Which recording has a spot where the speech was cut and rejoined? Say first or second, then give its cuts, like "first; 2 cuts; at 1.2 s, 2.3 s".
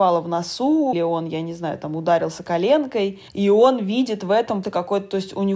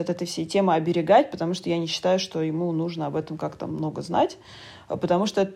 first; 3 cuts; at 0.9 s, 3.3 s, 4.6 s